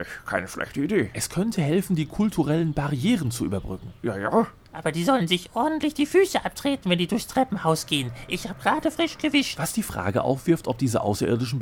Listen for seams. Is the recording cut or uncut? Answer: uncut